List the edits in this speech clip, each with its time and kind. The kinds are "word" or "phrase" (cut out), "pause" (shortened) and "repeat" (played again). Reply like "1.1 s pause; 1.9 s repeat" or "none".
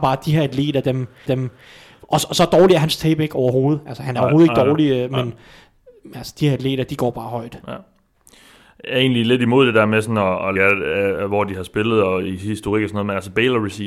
1.3 s repeat; 10.6 s phrase

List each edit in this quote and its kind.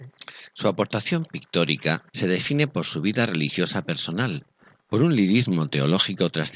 2.1 s pause

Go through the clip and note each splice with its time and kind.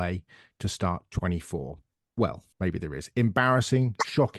1.1 s word; 2.5 s pause

